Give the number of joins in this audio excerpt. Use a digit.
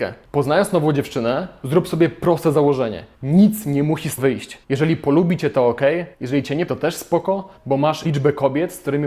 7